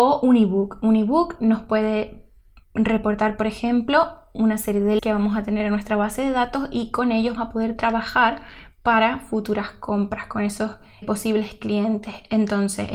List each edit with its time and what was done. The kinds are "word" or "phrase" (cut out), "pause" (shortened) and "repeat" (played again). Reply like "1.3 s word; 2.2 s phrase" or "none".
5.0 s word; 7.4 s word; 11.0 s word